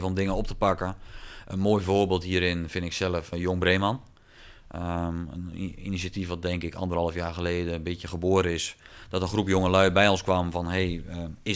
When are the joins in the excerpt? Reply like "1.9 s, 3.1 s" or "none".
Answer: 3.3 s